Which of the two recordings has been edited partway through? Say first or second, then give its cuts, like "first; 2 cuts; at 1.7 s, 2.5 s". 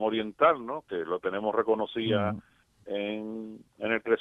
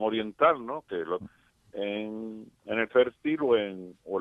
second; 2 cuts; at 1.2 s, 2.9 s